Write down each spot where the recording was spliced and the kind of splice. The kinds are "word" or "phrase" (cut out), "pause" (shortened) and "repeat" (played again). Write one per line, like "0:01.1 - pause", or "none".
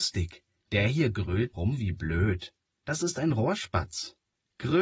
0:01.5 - word